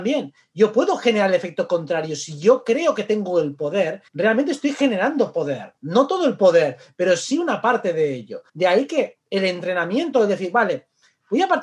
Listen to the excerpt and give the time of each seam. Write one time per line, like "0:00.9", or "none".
0:04.1
0:05.8
0:08.5